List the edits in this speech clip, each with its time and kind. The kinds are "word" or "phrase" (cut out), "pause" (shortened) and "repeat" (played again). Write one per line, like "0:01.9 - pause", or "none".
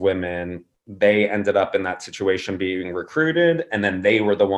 none